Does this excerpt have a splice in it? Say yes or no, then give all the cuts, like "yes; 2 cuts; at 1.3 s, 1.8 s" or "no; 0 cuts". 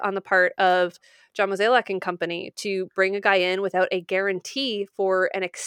no; 0 cuts